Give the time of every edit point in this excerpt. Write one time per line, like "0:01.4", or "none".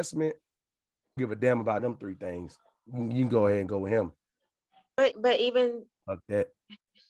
0:01.2
0:01.8
0:05.1